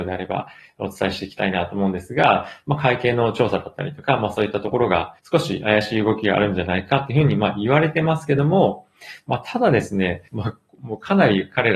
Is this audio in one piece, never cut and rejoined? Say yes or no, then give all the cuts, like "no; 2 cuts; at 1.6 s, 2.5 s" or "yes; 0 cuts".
no; 2 cuts; at 5.2 s, 10.3 s